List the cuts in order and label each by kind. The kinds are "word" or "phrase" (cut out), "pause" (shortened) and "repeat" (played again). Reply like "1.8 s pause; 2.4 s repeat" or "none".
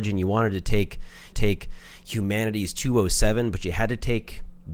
1.3 s repeat